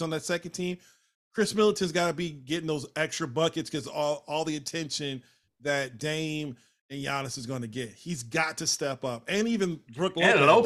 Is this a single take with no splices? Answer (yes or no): yes